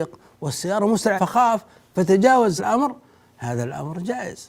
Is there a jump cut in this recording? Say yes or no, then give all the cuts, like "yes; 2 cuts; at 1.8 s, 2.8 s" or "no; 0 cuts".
yes; 2 cuts; at 1.2 s, 2.6 s